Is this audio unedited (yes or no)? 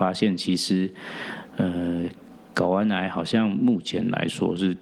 yes